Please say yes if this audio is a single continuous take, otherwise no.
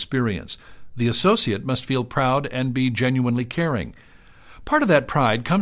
yes